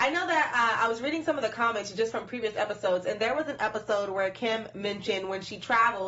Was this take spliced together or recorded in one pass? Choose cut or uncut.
uncut